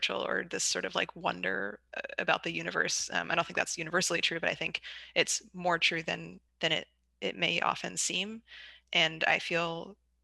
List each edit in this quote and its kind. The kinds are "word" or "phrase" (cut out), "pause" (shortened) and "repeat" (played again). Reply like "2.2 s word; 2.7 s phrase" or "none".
6.5 s word